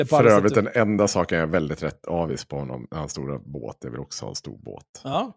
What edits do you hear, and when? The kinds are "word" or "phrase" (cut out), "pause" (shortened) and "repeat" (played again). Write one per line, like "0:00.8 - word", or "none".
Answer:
none